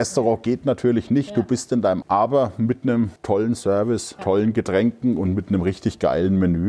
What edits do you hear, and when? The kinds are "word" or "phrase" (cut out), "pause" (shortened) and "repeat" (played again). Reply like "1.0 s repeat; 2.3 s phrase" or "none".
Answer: 2.0 s word; 3.2 s pause; 4.2 s word